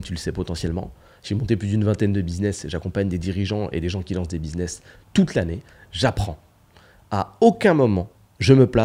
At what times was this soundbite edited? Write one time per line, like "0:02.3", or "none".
none